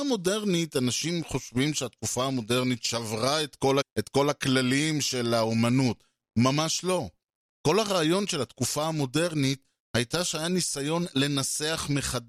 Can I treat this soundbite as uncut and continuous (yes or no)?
no